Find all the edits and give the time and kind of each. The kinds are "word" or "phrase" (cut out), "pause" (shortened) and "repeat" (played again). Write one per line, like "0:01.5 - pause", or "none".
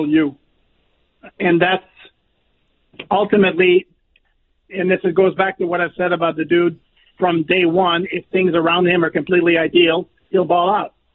none